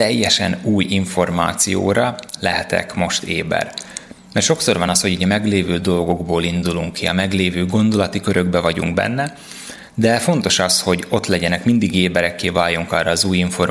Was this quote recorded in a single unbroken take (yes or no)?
yes